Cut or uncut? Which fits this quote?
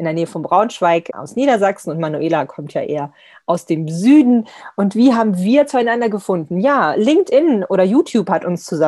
uncut